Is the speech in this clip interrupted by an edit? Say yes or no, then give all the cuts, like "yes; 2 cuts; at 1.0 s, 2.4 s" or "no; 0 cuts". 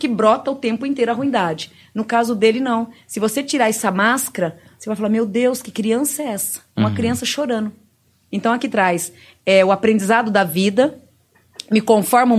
no; 0 cuts